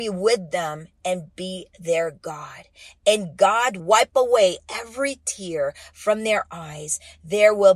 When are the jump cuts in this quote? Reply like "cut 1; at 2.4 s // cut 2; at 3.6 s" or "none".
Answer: cut 1; at 3.8 s